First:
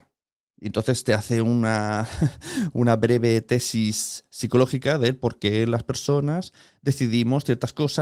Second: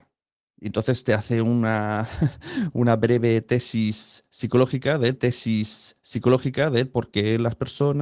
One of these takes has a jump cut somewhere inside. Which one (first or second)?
second